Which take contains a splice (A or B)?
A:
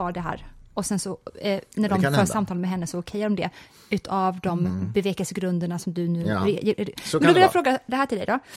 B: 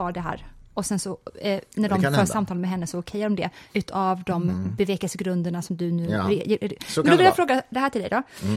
B